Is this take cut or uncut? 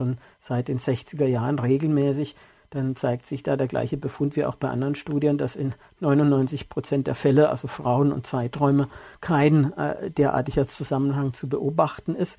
uncut